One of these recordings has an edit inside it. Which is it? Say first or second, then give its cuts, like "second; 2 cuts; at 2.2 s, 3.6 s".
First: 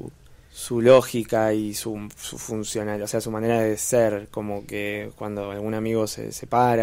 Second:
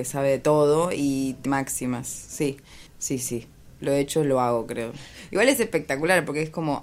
second; 2 cuts; at 1.5 s, 2.9 s